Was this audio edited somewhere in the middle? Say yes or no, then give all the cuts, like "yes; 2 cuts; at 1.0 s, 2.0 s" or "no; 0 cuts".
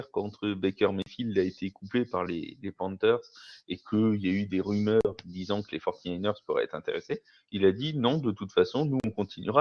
no; 0 cuts